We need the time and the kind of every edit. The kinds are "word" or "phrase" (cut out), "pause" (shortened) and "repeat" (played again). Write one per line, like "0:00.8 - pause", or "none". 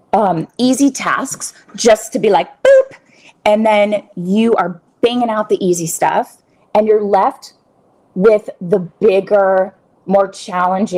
none